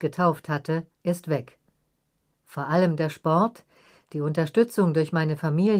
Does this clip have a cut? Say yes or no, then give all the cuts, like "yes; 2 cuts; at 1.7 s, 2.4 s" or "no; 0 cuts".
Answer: yes; 1 cut; at 0.9 s